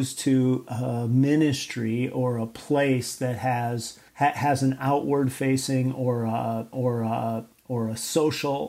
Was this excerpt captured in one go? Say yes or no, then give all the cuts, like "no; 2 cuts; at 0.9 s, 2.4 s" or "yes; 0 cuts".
no; 2 cuts; at 4.1 s, 6.7 s